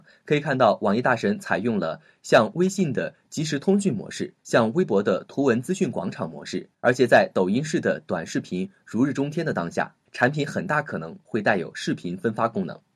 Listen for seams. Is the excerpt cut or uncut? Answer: cut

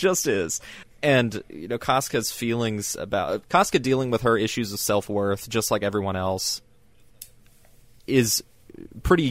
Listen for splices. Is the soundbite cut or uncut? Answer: uncut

